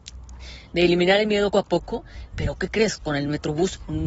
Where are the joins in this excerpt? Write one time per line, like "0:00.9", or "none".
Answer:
0:01.5